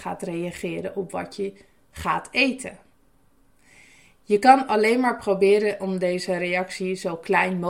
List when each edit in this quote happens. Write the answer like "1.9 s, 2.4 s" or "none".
none